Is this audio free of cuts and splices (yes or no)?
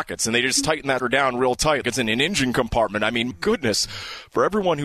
no